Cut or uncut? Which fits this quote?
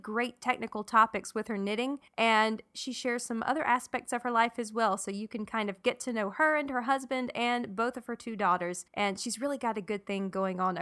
cut